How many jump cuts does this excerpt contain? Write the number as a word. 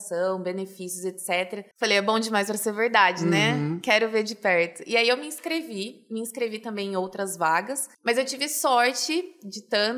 two